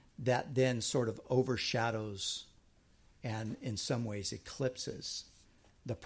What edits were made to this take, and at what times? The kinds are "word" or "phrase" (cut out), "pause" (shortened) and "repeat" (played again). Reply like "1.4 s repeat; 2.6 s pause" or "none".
none